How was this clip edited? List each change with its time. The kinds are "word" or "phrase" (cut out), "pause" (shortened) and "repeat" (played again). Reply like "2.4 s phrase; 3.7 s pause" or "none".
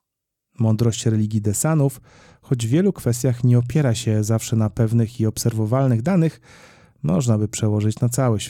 none